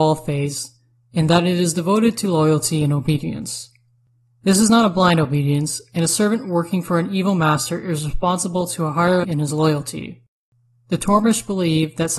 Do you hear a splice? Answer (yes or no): yes